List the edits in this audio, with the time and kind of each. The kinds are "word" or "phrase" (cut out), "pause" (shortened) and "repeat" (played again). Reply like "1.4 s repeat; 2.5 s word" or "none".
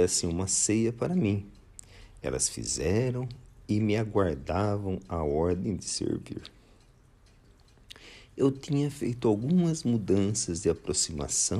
none